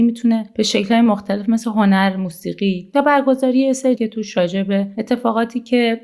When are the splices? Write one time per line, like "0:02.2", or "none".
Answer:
0:04.0